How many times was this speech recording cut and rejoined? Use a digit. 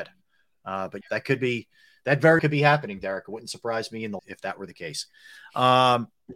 3